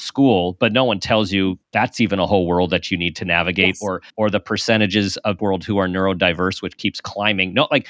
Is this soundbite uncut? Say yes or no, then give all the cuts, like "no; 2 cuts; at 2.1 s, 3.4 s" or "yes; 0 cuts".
no; 3 cuts; at 1.6 s, 4.1 s, 5.4 s